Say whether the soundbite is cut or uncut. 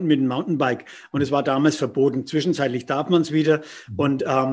uncut